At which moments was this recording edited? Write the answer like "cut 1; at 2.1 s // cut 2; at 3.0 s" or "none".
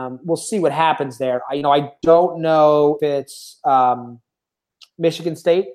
cut 1; at 3.0 s